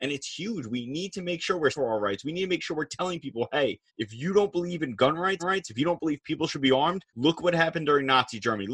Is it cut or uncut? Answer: cut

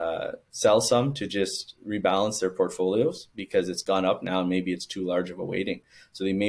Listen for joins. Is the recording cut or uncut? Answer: uncut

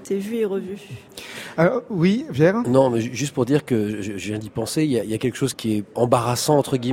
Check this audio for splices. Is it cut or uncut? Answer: cut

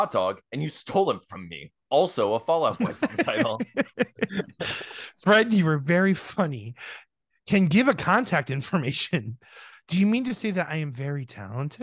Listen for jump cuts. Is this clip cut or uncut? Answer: uncut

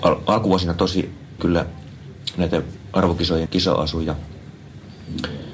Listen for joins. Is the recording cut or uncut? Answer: cut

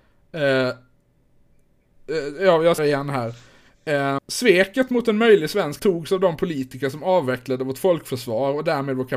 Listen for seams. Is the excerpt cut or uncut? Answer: cut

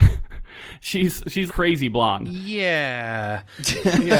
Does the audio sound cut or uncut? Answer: cut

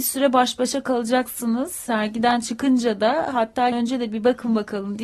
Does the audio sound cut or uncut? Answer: cut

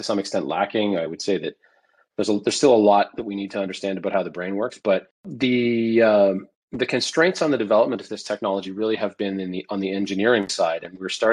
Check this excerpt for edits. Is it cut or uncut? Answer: uncut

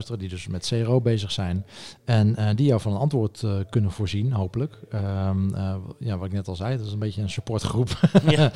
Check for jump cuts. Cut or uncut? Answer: uncut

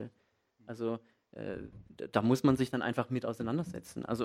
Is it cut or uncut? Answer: cut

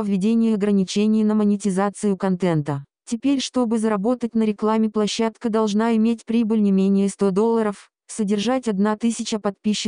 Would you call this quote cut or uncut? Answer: uncut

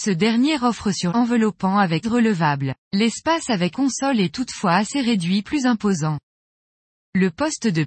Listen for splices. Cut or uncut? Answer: cut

